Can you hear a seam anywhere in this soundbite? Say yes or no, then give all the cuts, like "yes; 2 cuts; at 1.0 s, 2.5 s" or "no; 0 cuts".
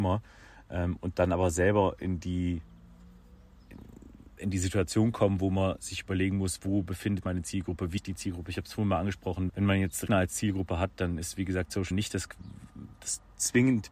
yes; 5 cuts; at 7.2 s, 8.0 s, 9.5 s, 10.1 s, 11.9 s